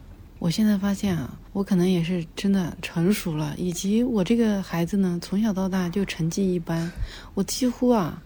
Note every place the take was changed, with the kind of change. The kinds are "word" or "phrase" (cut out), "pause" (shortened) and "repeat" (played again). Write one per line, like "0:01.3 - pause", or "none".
0:01.5 - pause